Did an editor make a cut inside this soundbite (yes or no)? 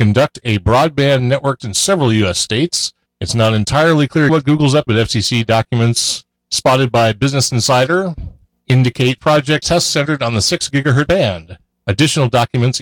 yes